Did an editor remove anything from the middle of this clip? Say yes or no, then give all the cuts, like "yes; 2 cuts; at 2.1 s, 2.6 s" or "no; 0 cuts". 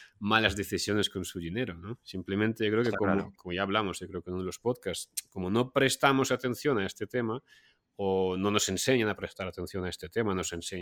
yes; 1 cut; at 3.4 s